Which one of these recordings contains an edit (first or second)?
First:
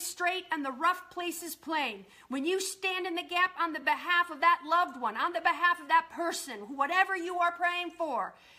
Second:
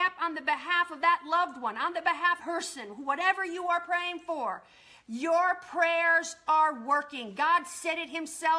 second